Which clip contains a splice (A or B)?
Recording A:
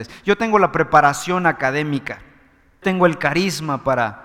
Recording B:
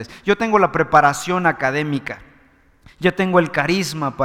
A